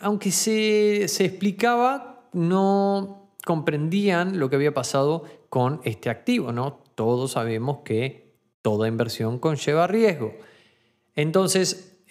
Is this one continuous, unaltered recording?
yes; 0 cuts

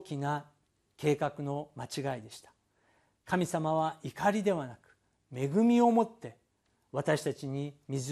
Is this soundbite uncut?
yes; 0 cuts

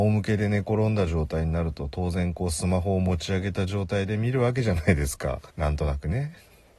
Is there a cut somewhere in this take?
yes; 1 cut; at 5.5 s

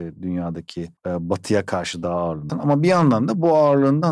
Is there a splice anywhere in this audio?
yes; 2 cuts; at 1.0 s, 2.5 s

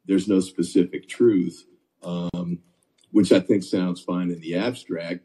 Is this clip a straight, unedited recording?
yes; 0 cuts

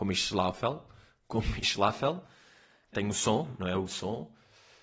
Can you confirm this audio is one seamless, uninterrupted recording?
no; 2 cuts; at 2.9 s, 3.9 s

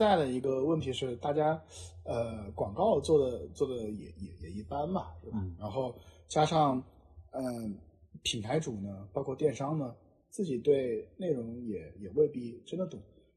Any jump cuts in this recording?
no; 0 cuts

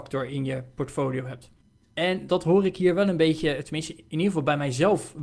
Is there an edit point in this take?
yes; 1 cut; at 2.3 s

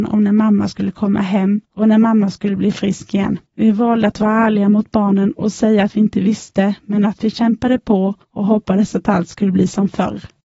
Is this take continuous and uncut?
no; 3 cuts; at 1.6 s, 3.5 s, 8.2 s

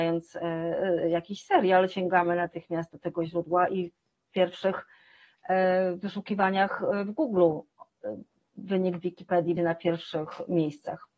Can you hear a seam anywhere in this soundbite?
yes; 1 cut; at 9.6 s

